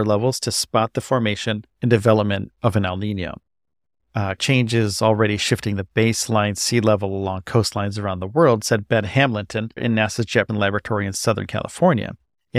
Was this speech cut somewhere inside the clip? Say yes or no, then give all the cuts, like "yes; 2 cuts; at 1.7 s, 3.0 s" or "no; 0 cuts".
yes; 4 cuts; at 1.7 s, 4.4 s, 9.8 s, 10.5 s